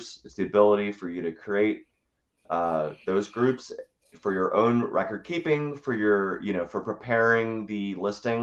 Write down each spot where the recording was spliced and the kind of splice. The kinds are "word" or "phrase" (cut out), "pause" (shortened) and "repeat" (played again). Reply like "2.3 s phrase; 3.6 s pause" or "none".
none